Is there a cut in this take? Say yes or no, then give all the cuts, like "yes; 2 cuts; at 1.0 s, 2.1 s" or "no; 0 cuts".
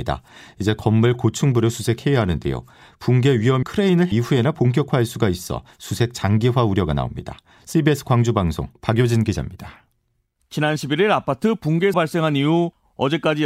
yes; 3 cuts; at 3.6 s, 4.1 s, 11.9 s